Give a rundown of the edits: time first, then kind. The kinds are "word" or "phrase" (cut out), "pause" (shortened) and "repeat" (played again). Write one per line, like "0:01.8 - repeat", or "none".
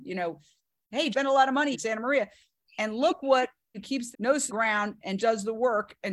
0:01.1 - word
0:01.7 - word
0:03.7 - word
0:04.1 - word
0:04.5 - word
0:05.2 - word